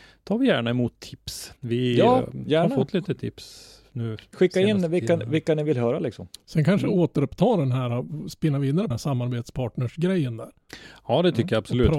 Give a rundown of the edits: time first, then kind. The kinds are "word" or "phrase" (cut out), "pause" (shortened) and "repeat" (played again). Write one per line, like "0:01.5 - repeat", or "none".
0:01.6 - pause
0:08.9 - phrase